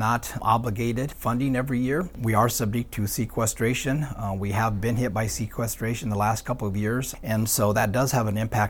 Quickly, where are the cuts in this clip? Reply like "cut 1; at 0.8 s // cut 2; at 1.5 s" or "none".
none